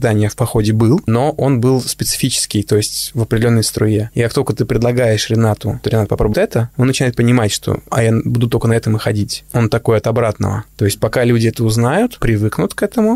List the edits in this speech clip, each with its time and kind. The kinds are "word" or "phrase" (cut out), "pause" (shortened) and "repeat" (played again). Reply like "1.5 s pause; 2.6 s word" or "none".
5.8 s word; 6.3 s word; 12.2 s word